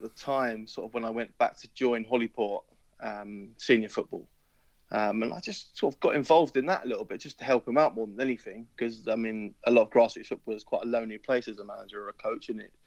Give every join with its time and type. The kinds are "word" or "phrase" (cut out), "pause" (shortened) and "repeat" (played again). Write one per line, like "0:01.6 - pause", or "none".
none